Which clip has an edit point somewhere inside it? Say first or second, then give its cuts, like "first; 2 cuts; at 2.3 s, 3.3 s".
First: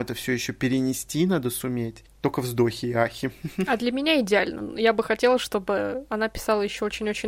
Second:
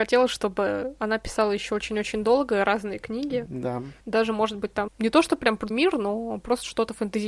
second; 3 cuts; at 4.0 s, 4.9 s, 5.7 s